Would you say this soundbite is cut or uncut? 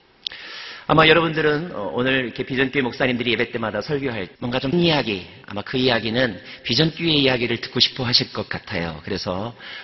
cut